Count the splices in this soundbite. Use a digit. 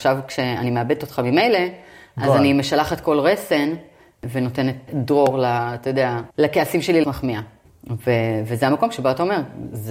3